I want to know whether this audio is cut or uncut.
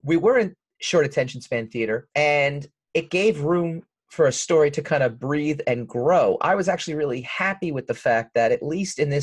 cut